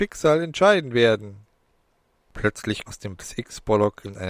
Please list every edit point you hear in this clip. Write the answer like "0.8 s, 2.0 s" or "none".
2.9 s, 3.2 s